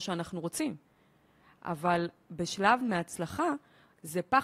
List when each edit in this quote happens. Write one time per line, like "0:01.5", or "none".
0:02.8